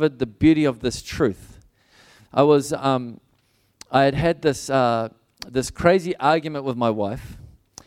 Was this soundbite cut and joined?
no; 0 cuts

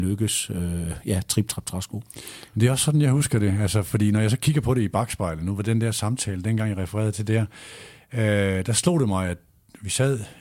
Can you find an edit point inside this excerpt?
no; 0 cuts

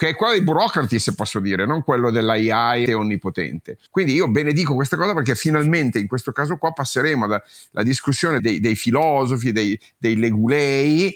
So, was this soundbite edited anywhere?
yes; 3 cuts; at 2.9 s, 3.9 s, 8.4 s

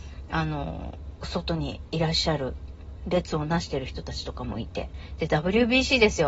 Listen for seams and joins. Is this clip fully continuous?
yes; 0 cuts

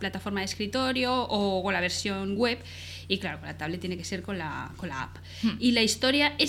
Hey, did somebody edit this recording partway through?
no; 0 cuts

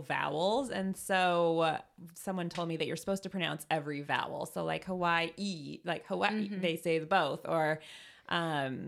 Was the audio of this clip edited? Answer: no; 0 cuts

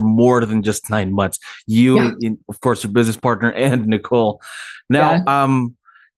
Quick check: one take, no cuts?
yes; 0 cuts

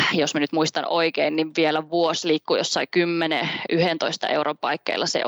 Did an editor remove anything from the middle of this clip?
yes; 1 cut; at 2.2 s

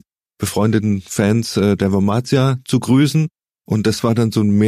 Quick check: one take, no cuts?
yes; 0 cuts

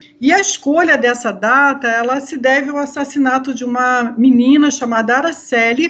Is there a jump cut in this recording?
no; 0 cuts

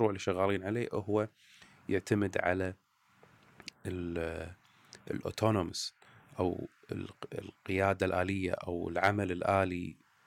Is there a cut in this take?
no; 0 cuts

